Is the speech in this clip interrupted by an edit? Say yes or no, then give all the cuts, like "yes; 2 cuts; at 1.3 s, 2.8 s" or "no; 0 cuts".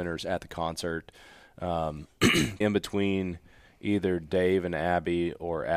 yes; 1 cut; at 2.6 s